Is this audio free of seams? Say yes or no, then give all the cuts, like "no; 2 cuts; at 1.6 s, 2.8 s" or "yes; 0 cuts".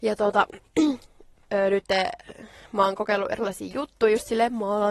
yes; 0 cuts